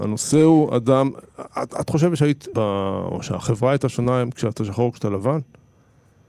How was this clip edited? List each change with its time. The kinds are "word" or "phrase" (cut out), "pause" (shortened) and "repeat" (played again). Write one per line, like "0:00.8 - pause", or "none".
0:02.5 - word

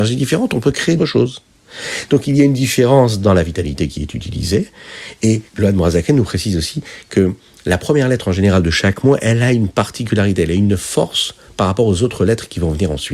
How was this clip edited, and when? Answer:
0:01.0 - word
0:05.5 - pause

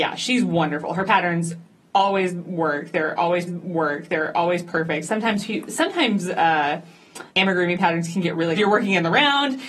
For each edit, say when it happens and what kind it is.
0:03.5 - repeat
0:07.3 - pause
0:08.6 - phrase

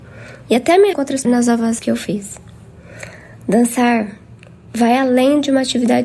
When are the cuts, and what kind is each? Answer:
0:00.9 - word
0:01.2 - phrase
0:01.8 - word

